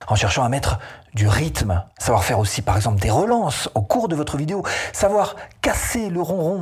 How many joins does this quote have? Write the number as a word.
one